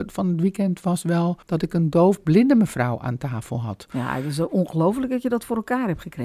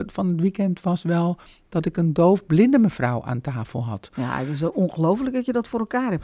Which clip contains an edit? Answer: first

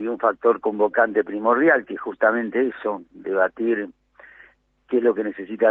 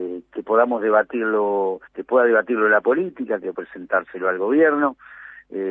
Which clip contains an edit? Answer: second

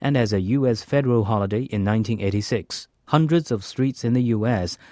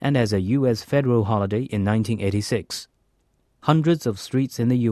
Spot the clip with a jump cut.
first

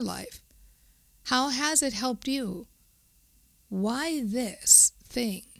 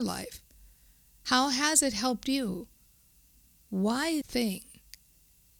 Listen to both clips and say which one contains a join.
second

